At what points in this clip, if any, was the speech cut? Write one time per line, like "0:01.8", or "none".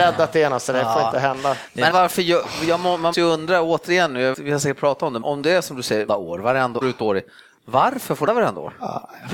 0:01.9
0:03.1
0:04.3
0:05.2
0:06.1
0:06.8
0:08.3